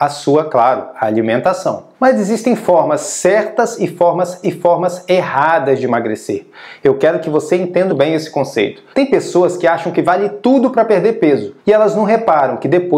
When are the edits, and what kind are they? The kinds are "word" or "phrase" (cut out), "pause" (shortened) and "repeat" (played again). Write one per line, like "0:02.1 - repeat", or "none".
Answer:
0:01.9 - pause
0:04.4 - repeat
0:07.9 - word
0:08.9 - pause
0:11.6 - pause